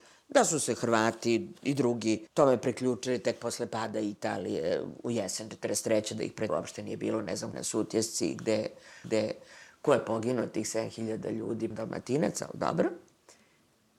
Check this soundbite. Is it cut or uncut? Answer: cut